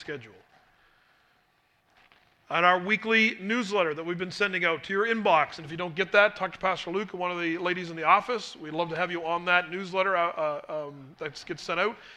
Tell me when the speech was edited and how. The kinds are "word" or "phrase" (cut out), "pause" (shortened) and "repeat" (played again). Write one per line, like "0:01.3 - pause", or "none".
none